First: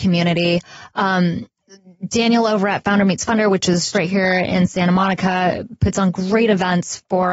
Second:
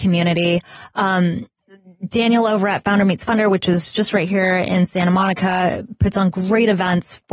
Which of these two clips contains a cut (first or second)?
first